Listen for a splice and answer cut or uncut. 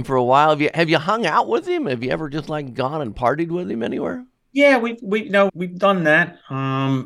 cut